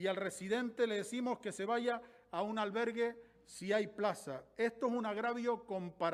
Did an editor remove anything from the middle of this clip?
no; 0 cuts

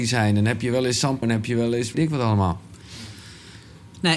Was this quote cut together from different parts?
yes; 2 cuts; at 1.2 s, 1.9 s

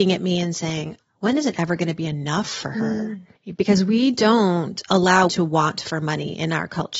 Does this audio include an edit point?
yes; 3 cuts; at 1.0 s, 3.3 s, 5.3 s

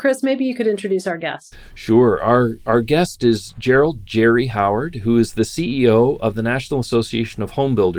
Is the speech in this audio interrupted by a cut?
no; 0 cuts

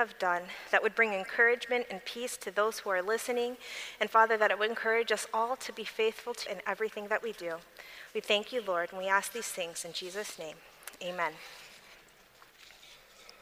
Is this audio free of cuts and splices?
no; 1 cut; at 6.5 s

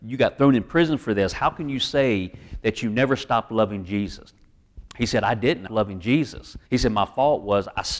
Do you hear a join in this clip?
yes; 2 cuts; at 5.7 s, 6.7 s

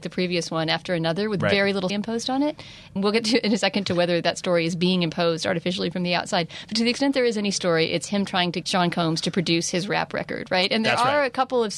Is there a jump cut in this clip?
yes; 3 cuts; at 1.9 s, 3.0 s, 8.6 s

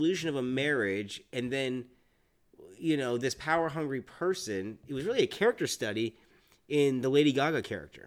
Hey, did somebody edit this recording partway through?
no; 0 cuts

